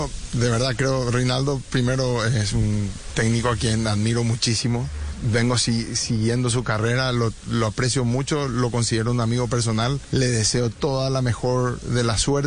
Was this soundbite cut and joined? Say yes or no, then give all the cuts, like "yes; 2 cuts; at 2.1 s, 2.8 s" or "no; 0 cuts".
no; 0 cuts